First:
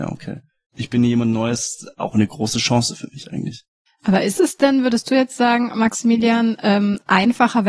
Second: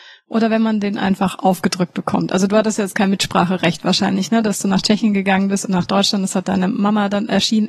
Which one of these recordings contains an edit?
first; 1 cut; at 3.9 s

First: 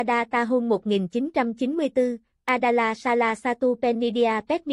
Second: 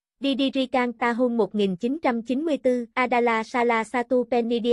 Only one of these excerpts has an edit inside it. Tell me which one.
second; 2 cuts; at 0.9 s, 2.9 s

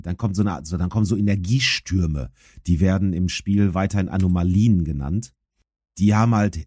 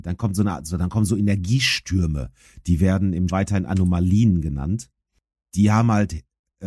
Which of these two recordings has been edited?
second; 1 cut; at 3.3 s

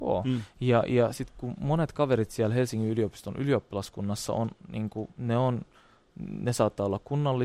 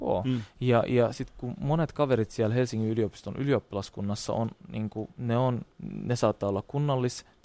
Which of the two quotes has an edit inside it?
second; 1 cut; at 5.7 s

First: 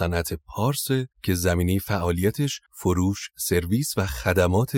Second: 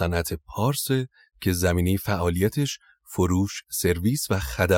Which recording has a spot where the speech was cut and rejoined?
first; 2 cuts; at 1.1 s, 2.7 s

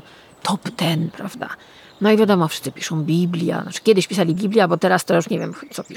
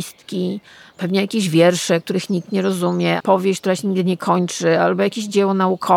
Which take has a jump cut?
second; 1 cut; at 3.2 s

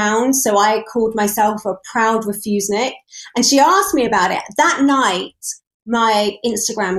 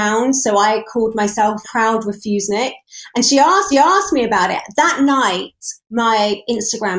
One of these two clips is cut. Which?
second; 3 cuts; at 1.6 s, 3.7 s, 5.8 s

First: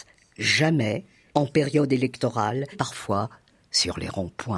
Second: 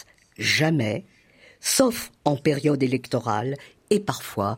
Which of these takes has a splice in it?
first; 2 cuts; at 1.3 s, 2.7 s

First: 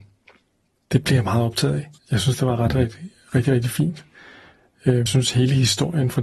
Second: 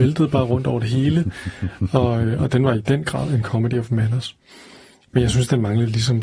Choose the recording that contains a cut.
first; 2 cuts; at 2.0 s, 5.1 s

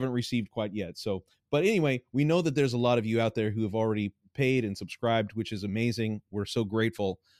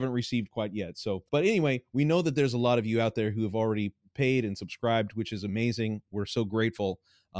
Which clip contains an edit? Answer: second; 1 cut; at 1.3 s

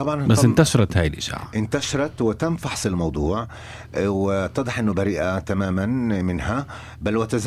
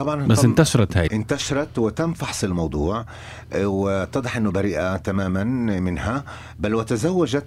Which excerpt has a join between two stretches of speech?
second; 1 cut; at 1.1 s

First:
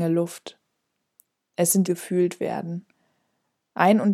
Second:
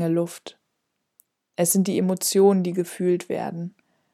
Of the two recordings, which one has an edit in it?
first; 1 cut; at 1.8 s

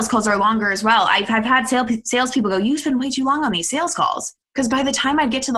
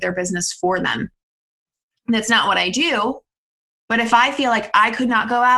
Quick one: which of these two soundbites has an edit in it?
first; 1 cut; at 4.4 s

